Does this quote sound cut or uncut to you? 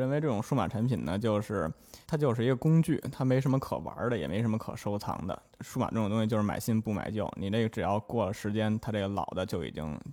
cut